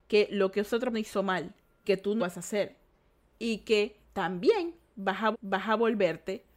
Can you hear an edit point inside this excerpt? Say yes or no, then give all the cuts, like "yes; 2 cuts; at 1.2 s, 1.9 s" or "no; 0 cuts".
yes; 5 cuts; at 0.9 s, 1.8 s, 2.2 s, 4.0 s, 5.3 s